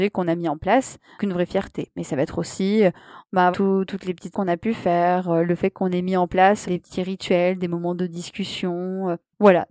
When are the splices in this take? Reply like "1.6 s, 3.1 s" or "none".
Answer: 1.2 s, 3.5 s, 4.3 s, 6.6 s

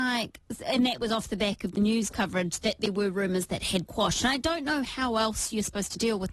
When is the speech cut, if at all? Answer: 3.9 s

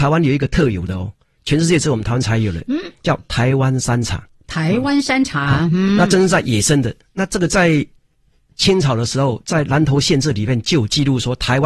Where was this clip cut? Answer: none

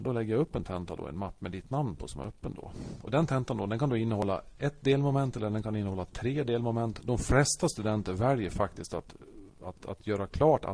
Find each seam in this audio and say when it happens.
none

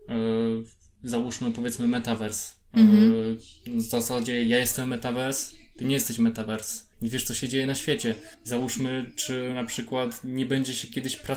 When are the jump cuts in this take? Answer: 6.9 s, 8.3 s

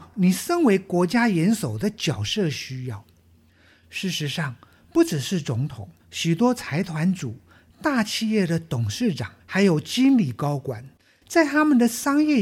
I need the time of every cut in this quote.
6.0 s, 9.4 s

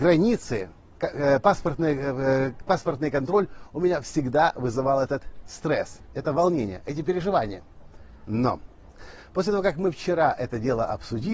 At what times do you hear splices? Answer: none

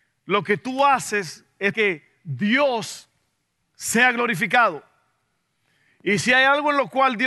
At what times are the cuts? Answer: 1.7 s

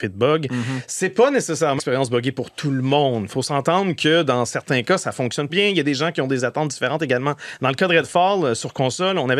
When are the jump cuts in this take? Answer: 1.8 s, 5.5 s

